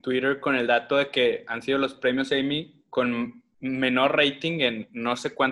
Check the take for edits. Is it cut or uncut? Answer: uncut